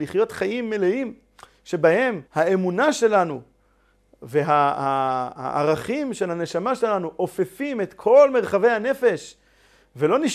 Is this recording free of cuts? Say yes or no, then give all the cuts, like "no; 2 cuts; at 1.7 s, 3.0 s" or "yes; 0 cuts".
no; 1 cut; at 2.3 s